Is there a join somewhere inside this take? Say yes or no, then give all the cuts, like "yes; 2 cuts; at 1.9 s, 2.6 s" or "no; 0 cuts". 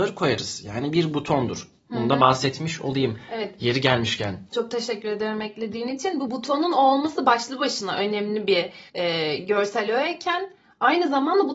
yes; 3 cuts; at 1.8 s, 4.5 s, 8.9 s